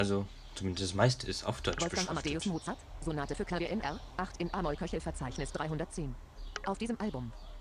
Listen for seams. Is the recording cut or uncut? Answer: uncut